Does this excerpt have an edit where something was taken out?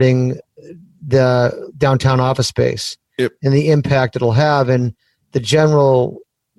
no; 0 cuts

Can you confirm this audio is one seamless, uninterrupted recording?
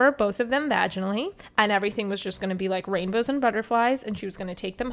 yes; 0 cuts

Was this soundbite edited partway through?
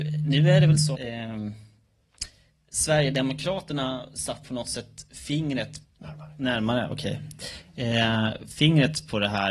yes; 3 cuts; at 0.9 s, 4.4 s, 5.8 s

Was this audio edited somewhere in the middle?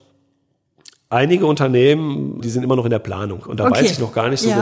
yes; 1 cut; at 2.4 s

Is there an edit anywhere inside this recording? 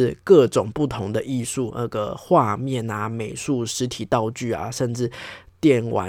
yes; 1 cut; at 1.7 s

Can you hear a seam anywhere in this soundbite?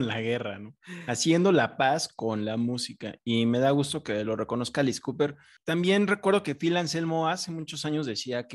no; 0 cuts

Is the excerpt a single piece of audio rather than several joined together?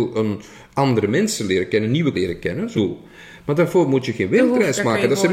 no; 2 cuts; at 2.1 s, 2.7 s

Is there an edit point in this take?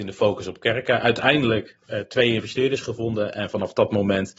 no; 0 cuts

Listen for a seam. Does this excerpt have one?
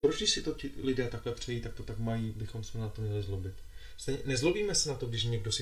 no; 0 cuts

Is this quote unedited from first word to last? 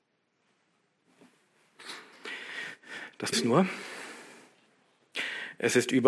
no; 1 cut; at 3.3 s

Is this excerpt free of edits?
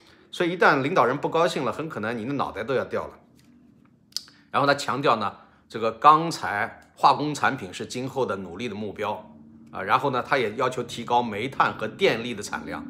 yes; 0 cuts

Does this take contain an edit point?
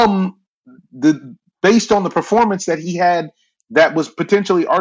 no; 0 cuts

